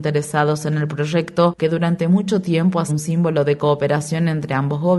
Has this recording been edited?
yes; 1 cut; at 2.9 s

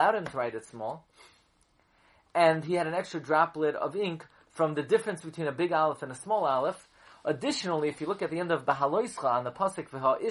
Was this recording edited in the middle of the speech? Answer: no; 0 cuts

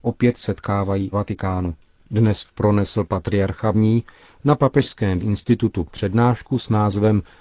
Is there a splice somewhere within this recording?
yes; 4 cuts; at 1.1 s, 2.5 s, 3.7 s, 5.2 s

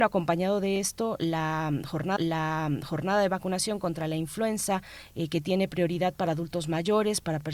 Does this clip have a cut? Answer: yes; 1 cut; at 2.2 s

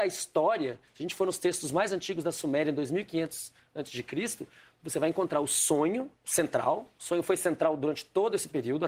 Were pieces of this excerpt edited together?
yes; 1 cut; at 6.1 s

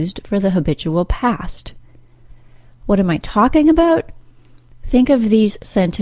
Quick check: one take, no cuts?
yes; 0 cuts

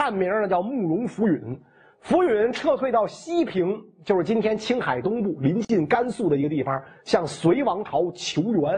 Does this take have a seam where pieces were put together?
no; 0 cuts

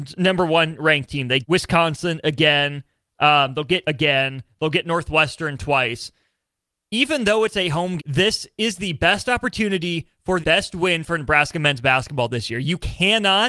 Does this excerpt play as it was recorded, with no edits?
no; 4 cuts; at 1.4 s, 3.8 s, 8.0 s, 10.4 s

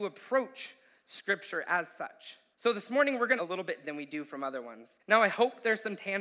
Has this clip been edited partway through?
yes; 4 cuts; at 2.5 s, 3.4 s, 3.8 s, 5.0 s

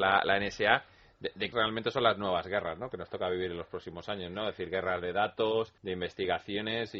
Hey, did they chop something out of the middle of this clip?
yes; 2 cuts; at 1.5 s, 5.8 s

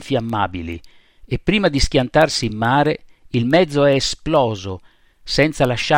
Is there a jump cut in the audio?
no; 0 cuts

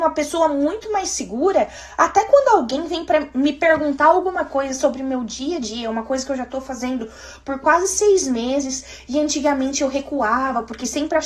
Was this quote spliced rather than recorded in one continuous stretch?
no; 0 cuts

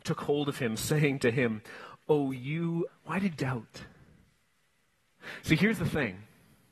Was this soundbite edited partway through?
yes; 2 cuts; at 2.9 s, 3.3 s

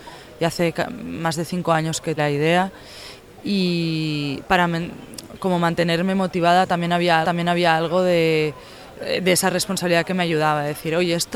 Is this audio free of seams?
no; 2 cuts; at 2.2 s, 7.2 s

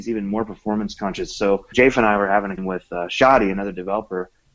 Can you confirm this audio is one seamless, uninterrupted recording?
no; 2 cuts; at 1.7 s, 2.6 s

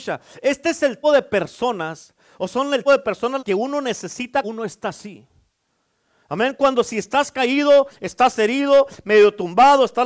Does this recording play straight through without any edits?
no; 4 cuts; at 1.0 s, 2.9 s, 3.4 s, 4.4 s

